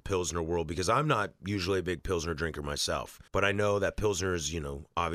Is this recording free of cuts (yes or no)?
no